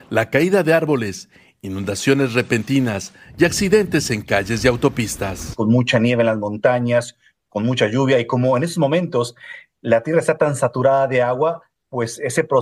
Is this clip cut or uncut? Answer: uncut